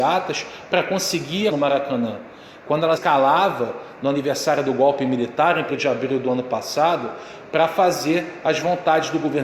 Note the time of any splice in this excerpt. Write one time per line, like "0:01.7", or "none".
0:01.5
0:03.0
0:05.7